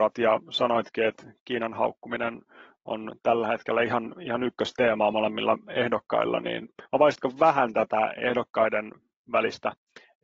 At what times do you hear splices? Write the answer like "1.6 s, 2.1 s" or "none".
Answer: 6.9 s